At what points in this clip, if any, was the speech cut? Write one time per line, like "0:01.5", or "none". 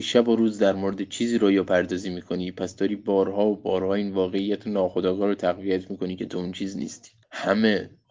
none